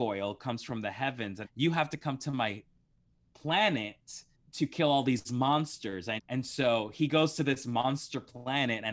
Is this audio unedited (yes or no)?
no